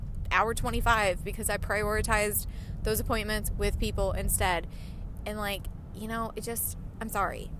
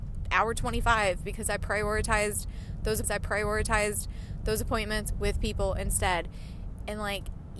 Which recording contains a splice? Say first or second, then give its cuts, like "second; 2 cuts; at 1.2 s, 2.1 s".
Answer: second; 1 cut; at 3.0 s